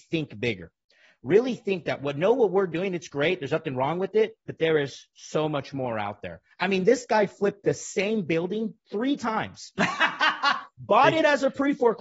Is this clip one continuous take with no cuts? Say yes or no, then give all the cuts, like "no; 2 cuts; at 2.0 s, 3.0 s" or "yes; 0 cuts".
yes; 0 cuts